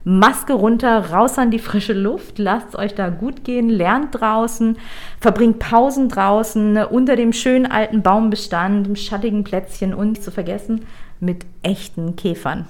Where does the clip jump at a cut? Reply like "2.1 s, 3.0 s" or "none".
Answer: none